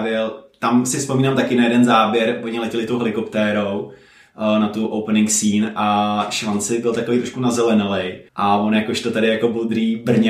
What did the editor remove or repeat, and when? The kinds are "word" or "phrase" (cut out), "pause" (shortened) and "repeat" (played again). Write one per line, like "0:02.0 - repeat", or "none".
0:08.3 - pause

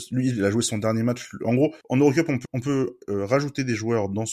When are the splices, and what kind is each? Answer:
0:01.8 - pause
0:02.4 - word

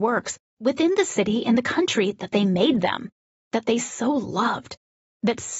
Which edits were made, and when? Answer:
none

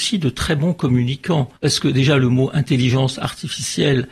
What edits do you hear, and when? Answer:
0:01.6 - pause

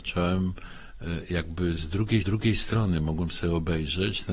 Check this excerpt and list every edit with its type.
0:02.2 - repeat

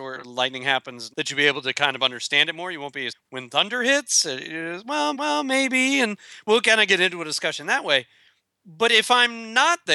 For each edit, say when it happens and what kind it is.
0:01.1 - word
0:03.1 - word
0:05.1 - repeat

